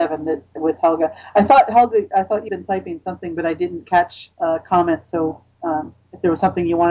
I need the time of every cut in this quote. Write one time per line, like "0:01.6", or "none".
0:02.5
0:04.3